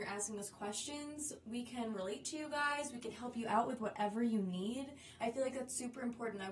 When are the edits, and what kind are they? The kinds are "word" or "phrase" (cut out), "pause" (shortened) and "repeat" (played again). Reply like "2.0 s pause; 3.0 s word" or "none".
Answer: none